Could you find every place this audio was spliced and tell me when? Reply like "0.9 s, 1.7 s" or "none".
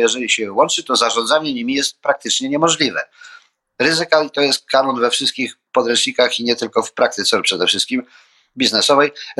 none